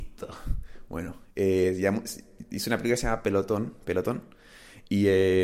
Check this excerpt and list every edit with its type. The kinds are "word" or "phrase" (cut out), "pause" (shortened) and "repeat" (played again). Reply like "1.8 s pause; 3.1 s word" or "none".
1.3 s pause